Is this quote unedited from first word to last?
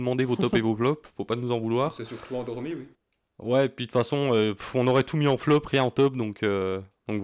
yes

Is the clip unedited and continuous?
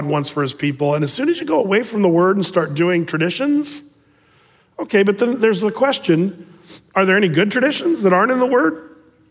yes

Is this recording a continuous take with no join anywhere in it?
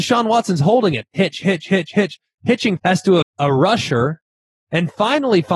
no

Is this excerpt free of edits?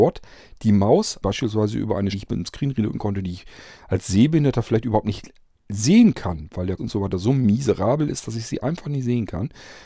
no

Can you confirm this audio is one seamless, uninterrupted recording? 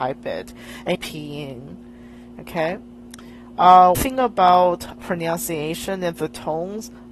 no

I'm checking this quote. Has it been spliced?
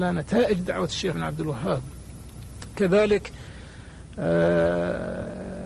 yes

